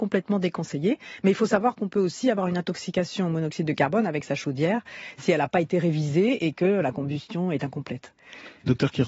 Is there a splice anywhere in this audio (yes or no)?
no